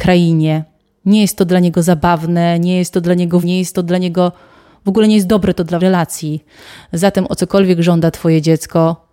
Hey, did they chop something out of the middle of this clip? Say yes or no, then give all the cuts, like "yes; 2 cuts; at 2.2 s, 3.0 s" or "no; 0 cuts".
yes; 2 cuts; at 3.4 s, 5.8 s